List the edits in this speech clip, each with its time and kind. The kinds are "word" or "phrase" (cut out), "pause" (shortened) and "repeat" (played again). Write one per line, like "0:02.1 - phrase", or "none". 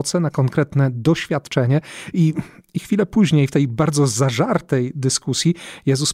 none